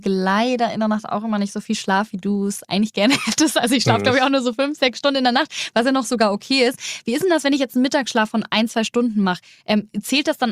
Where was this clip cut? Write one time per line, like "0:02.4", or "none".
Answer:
none